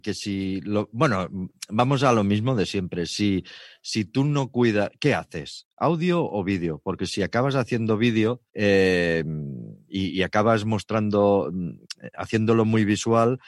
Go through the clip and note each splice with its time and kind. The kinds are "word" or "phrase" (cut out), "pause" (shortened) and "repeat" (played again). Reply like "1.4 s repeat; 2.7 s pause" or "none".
8.5 s pause